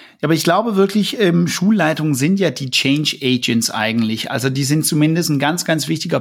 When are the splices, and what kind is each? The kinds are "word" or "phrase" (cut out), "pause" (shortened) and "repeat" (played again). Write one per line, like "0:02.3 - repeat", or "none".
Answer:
none